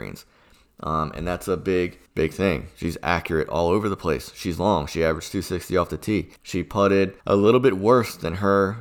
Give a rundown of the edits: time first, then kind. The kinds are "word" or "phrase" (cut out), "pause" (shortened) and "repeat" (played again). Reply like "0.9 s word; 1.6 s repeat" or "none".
2.1 s pause; 6.4 s pause; 7.2 s pause